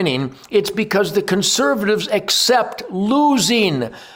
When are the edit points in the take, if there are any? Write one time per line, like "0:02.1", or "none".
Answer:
none